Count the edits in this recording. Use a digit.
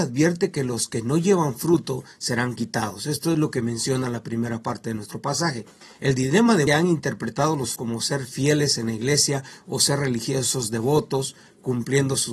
3